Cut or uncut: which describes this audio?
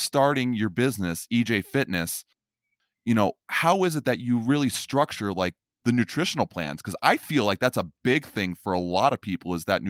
uncut